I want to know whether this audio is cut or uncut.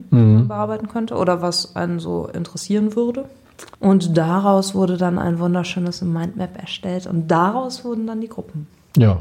cut